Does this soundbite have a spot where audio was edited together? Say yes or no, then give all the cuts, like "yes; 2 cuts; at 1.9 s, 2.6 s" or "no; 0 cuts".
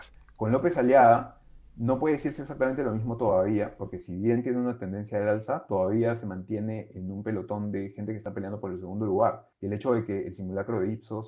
yes; 1 cut; at 9.5 s